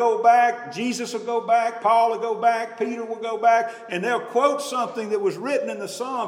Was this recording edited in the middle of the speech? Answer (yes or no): no